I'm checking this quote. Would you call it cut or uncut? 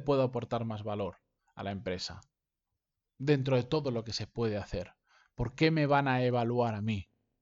uncut